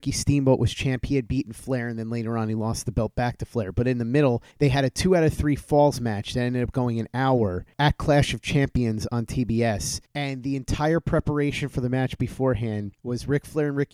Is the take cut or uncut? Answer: cut